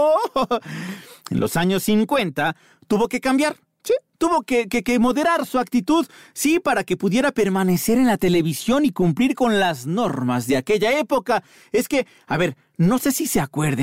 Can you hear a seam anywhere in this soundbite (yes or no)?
no